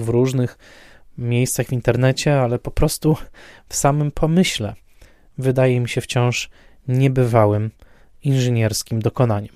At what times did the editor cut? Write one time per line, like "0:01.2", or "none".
none